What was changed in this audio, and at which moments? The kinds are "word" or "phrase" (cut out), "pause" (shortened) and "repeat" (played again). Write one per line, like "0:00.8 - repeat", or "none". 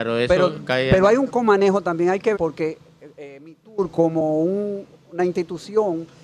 0:02.3 - word